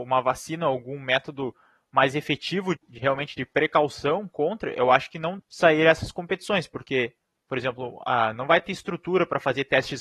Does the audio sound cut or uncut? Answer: cut